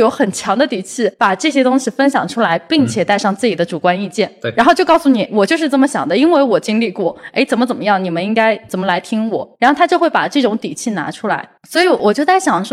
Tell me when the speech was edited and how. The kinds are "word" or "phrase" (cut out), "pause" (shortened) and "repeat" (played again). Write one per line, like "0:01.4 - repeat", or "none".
0:01.1 - pause
0:05.3 - word
0:09.5 - pause
0:11.6 - pause